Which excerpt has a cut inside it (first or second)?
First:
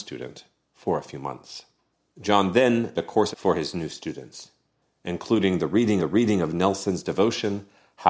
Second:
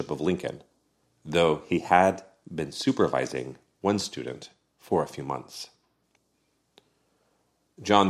first